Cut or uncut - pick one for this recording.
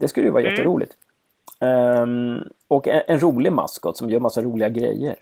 cut